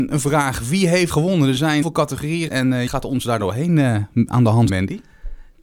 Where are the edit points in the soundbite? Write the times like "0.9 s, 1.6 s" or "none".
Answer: 1.1 s, 1.8 s, 2.5 s, 2.9 s, 4.7 s